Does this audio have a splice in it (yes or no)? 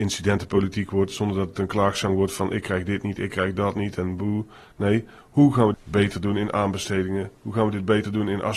yes